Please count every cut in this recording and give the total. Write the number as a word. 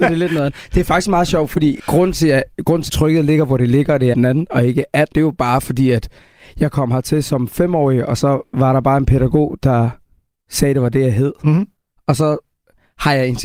three